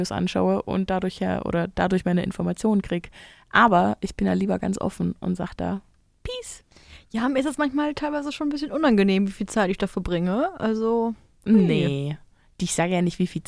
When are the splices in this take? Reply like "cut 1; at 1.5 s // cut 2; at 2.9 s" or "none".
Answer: none